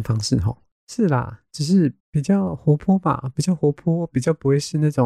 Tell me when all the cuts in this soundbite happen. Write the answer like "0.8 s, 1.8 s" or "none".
2.0 s